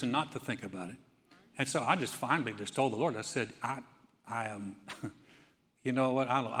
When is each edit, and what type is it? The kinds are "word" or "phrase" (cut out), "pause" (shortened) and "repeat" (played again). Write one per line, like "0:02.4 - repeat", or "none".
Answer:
none